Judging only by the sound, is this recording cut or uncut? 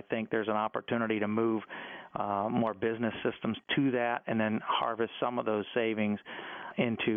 uncut